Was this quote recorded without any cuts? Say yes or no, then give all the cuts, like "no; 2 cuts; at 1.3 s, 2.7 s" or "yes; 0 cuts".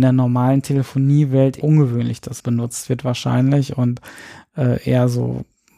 no; 2 cuts; at 1.6 s, 2.4 s